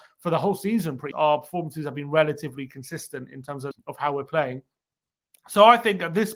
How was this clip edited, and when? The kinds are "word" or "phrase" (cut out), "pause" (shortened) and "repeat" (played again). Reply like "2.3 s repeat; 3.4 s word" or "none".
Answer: 1.1 s word; 3.7 s word